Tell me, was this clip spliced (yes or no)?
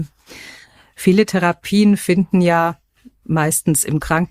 no